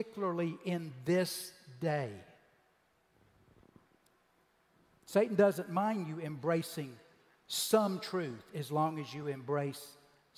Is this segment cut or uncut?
uncut